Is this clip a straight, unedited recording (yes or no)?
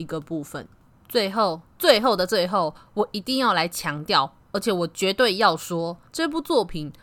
no